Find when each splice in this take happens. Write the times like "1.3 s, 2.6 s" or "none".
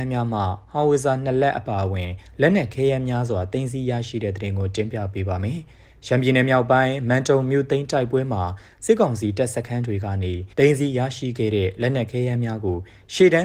10.5 s

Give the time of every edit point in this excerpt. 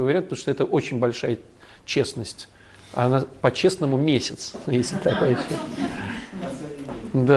none

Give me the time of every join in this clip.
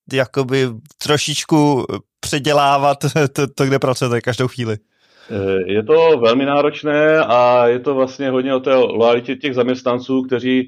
none

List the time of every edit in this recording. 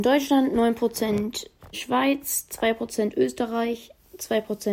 1.7 s

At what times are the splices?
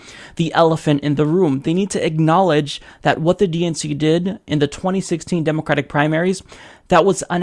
none

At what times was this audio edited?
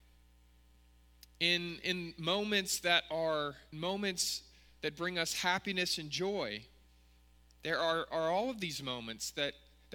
3.7 s

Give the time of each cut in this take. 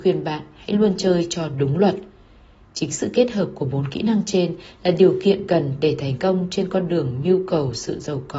none

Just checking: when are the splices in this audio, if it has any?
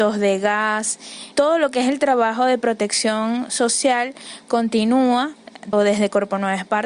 1.3 s, 5.7 s

